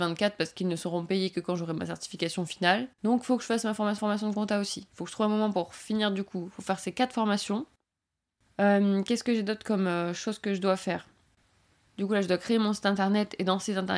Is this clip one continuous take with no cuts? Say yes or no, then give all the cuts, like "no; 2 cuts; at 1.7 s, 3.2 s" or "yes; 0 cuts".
no; 2 cuts; at 2.9 s, 4.0 s